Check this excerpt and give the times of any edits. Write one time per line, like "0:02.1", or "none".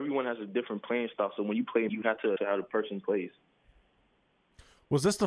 0:01.9
0:02.4